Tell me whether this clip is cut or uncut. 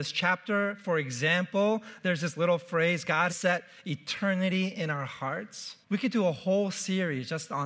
cut